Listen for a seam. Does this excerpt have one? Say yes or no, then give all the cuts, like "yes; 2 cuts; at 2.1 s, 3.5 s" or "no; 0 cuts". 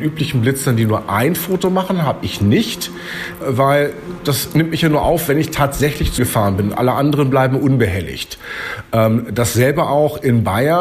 yes; 2 cuts; at 3.4 s, 6.2 s